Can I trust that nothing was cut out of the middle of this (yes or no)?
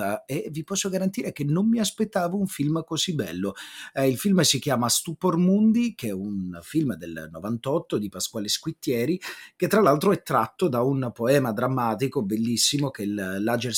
yes